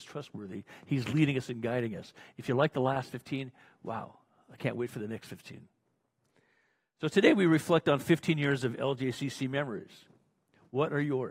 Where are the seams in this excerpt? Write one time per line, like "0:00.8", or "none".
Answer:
none

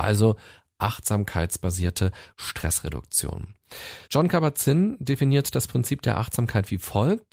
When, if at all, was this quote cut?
0:04.0

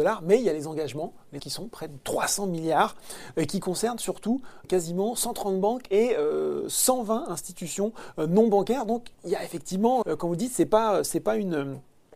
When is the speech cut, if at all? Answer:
0:01.4
0:04.6
0:09.1
0:10.0

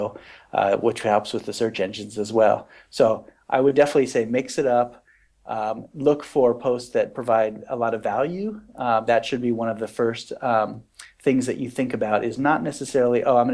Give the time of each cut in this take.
none

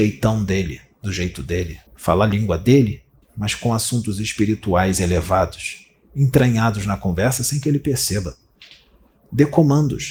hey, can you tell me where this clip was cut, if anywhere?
0:01.9
0:03.2

